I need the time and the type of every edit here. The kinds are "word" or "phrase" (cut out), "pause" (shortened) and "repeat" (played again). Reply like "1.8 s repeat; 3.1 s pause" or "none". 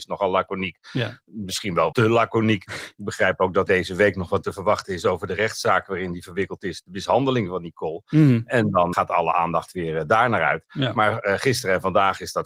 1.9 s word; 3.7 s word; 4.4 s word; 8.9 s word

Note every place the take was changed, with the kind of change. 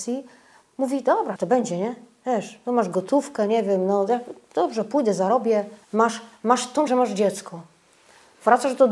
1.4 s word; 5.8 s pause; 6.9 s word

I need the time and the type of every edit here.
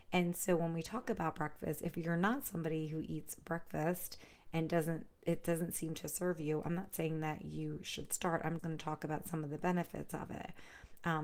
8.6 s word

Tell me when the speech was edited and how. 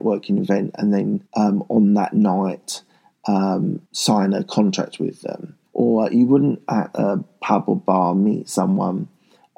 1.3 s pause; 3.9 s pause; 5.7 s pause

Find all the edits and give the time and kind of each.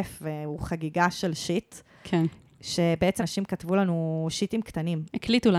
3.2 s word

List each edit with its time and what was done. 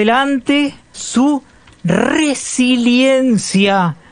0.9 s phrase

